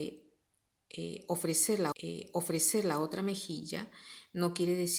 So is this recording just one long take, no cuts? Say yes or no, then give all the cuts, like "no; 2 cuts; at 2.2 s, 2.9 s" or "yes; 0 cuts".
no; 1 cut; at 1.9 s